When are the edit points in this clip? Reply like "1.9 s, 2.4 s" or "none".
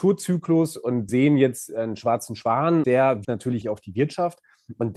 1.1 s, 2.8 s, 3.2 s, 3.6 s